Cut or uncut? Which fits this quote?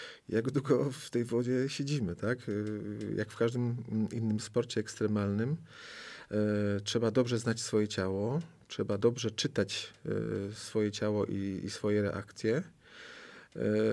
uncut